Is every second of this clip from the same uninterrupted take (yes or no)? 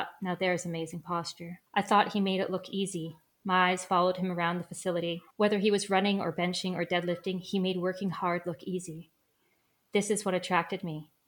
no